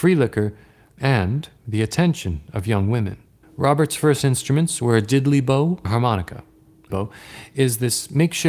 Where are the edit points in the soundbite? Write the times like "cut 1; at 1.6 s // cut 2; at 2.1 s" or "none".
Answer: cut 1; at 1.6 s // cut 2; at 3.4 s // cut 3; at 5.8 s // cut 4; at 6.9 s